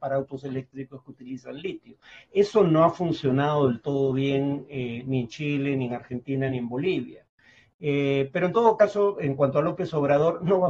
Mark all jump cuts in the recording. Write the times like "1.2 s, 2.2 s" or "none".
none